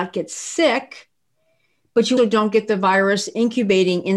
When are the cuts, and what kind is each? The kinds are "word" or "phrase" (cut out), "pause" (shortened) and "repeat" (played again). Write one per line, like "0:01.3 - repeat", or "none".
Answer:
0:02.2 - word